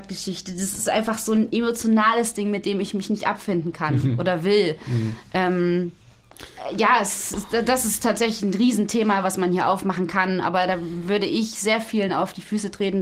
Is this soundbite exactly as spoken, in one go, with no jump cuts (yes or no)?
yes